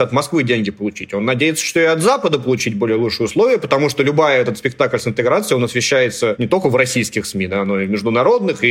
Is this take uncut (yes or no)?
yes